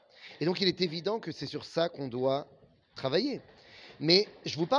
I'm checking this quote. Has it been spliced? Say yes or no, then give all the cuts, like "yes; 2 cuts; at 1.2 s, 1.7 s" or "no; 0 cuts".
no; 0 cuts